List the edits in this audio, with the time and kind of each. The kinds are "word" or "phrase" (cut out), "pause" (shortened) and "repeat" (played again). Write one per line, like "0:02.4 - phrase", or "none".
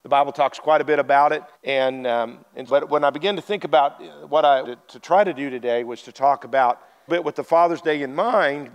0:01.5 - pause
0:02.7 - word
0:04.6 - word
0:07.1 - phrase